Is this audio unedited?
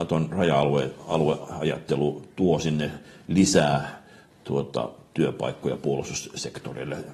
yes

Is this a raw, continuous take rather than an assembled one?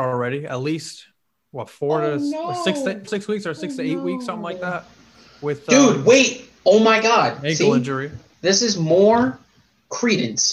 no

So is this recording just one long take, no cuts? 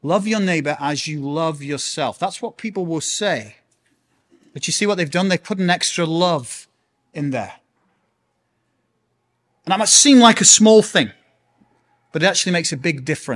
yes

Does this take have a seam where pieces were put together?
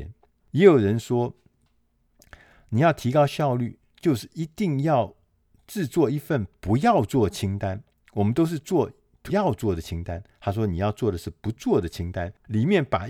yes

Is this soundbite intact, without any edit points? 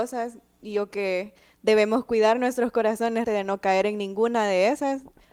no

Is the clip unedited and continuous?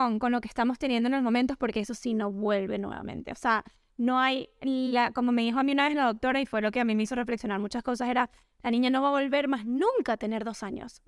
yes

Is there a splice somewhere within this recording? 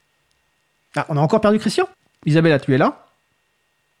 yes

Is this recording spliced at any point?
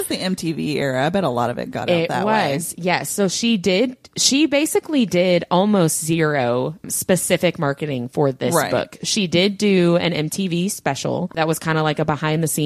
no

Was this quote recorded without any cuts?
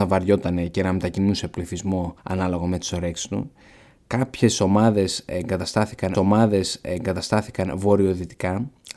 no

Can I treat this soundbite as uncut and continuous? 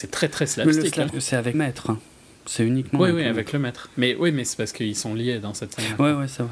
no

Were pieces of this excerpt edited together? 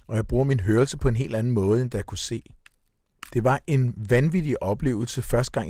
no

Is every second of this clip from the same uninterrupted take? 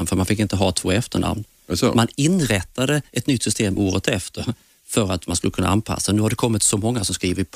yes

